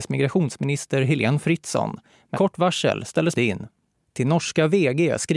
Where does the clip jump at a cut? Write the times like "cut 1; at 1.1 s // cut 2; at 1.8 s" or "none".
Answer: cut 1; at 2.3 s // cut 2; at 3.3 s

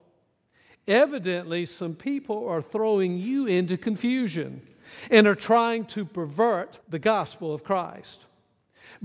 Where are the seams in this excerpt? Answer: cut 1; at 6.8 s

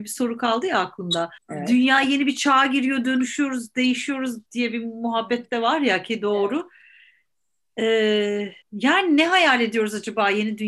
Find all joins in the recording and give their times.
cut 1; at 1.4 s // cut 2; at 4.5 s // cut 3; at 8.6 s

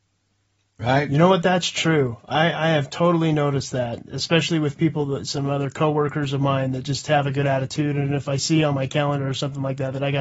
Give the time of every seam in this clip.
none

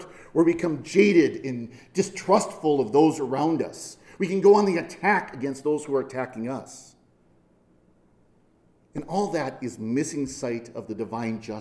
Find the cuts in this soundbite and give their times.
none

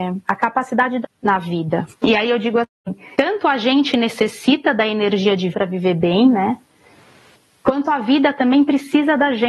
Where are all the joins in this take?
cut 1; at 1.0 s // cut 2; at 1.9 s // cut 3; at 3.2 s // cut 4; at 5.5 s

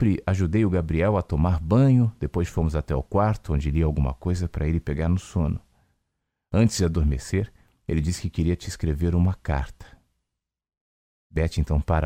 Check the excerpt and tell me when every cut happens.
none

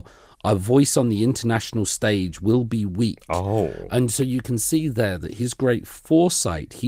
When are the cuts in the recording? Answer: none

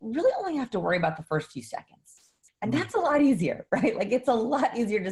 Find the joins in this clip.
none

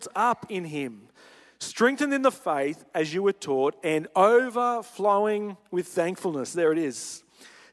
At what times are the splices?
none

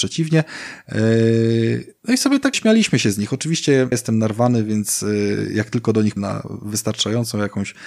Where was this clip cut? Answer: cut 1; at 2.5 s // cut 2; at 3.9 s // cut 3; at 6.2 s

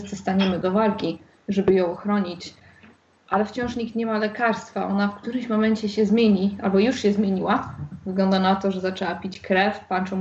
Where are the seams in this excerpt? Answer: none

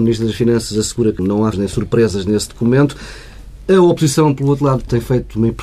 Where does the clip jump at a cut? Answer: cut 1; at 1.2 s // cut 2; at 1.5 s

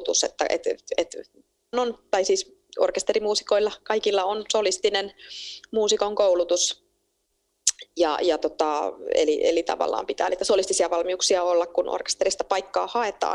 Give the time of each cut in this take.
cut 1; at 1.7 s

